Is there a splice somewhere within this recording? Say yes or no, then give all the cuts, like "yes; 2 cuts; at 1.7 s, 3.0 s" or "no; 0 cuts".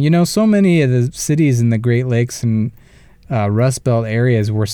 no; 0 cuts